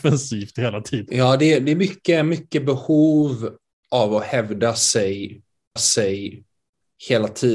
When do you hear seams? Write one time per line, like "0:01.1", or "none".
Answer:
0:05.8